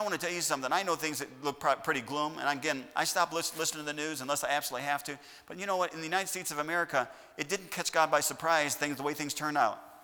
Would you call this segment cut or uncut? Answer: uncut